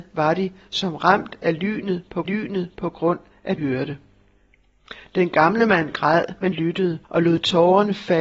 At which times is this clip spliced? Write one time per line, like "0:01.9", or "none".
0:02.2
0:03.6
0:06.5
0:07.0